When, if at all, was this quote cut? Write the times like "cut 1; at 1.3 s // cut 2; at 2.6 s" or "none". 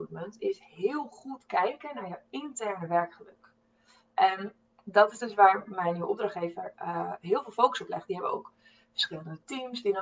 none

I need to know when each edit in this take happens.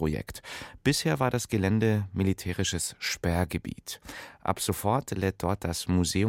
none

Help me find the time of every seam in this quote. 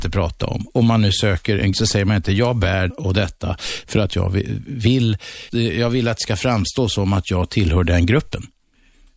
cut 1; at 1.7 s // cut 2; at 2.9 s // cut 3; at 5.5 s

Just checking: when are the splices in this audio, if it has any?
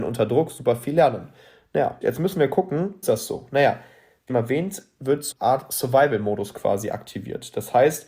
cut 1; at 2.0 s // cut 2; at 3.0 s // cut 3; at 4.3 s // cut 4; at 5.3 s

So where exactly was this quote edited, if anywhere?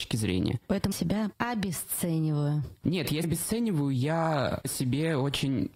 cut 1; at 0.9 s // cut 2; at 1.3 s // cut 3; at 3.2 s // cut 4; at 4.6 s

